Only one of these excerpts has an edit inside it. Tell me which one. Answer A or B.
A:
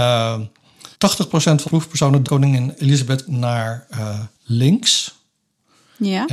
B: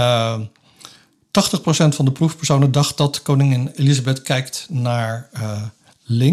A